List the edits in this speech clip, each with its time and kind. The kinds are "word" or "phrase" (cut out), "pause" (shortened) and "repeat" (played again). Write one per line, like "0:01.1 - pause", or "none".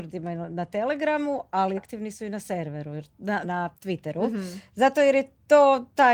0:01.8 - word
0:03.4 - word